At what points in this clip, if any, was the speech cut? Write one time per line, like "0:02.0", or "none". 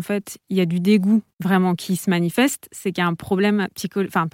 0:01.3